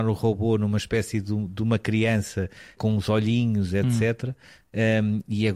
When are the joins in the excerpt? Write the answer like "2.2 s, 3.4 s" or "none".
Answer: 2.8 s